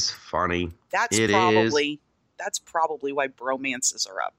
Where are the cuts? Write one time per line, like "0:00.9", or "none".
none